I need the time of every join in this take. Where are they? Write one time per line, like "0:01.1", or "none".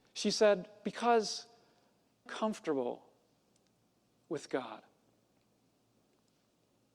0:02.3